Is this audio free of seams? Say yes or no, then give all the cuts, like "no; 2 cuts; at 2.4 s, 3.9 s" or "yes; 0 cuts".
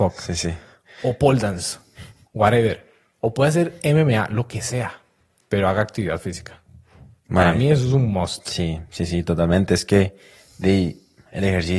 yes; 0 cuts